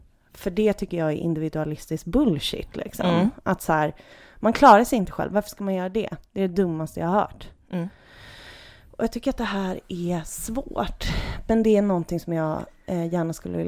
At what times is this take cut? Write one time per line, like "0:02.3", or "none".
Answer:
none